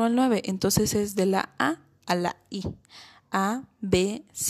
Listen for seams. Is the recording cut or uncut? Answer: uncut